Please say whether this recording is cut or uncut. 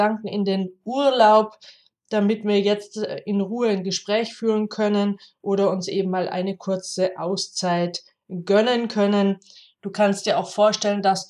uncut